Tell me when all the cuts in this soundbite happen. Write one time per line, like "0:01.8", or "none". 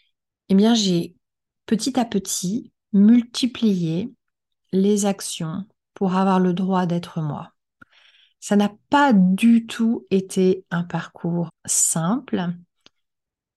0:11.5